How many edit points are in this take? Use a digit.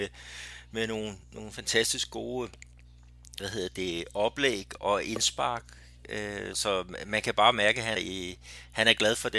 4